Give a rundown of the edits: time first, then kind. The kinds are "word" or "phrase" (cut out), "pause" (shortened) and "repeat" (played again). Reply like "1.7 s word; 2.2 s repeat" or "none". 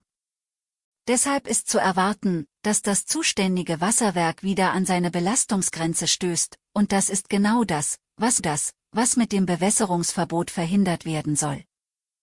8.4 s repeat